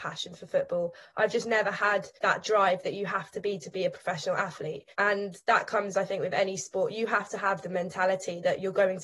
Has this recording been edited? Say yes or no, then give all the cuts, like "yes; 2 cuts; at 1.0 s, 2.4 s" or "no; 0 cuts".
yes; 2 cuts; at 2.2 s, 4.9 s